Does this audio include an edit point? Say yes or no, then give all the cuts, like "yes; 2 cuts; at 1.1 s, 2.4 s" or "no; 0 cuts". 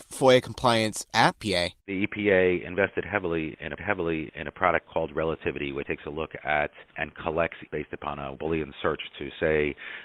yes; 6 cuts; at 1.4 s, 1.8 s, 3.8 s, 5.8 s, 7.7 s, 8.3 s